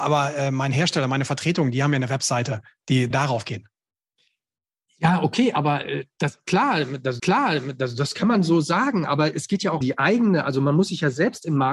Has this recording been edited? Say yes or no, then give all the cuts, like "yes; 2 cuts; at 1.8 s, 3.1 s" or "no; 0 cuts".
yes; 3 cuts; at 3.1 s, 7.2 s, 9.8 s